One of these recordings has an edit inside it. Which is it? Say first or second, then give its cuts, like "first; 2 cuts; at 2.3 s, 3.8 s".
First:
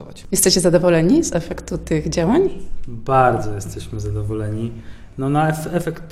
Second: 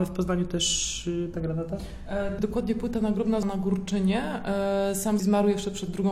second; 4 cuts; at 1.3 s, 2.4 s, 3.4 s, 5.2 s